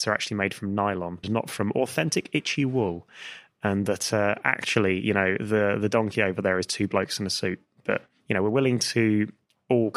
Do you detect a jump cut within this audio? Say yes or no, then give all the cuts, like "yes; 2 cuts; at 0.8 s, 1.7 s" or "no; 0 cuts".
yes; 1 cut; at 1.2 s